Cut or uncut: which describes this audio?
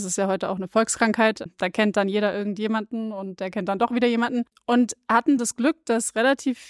uncut